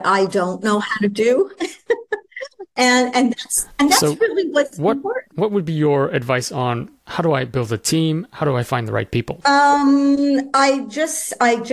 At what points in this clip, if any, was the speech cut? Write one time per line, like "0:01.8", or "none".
0:07.0